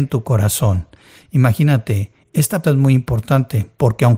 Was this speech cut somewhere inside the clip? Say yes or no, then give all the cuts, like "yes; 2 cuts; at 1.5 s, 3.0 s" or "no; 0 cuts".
yes; 1 cut; at 2.6 s